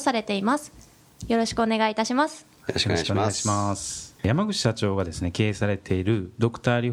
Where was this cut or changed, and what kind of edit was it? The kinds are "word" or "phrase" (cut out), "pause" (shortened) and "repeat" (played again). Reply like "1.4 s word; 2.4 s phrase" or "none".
4.2 s pause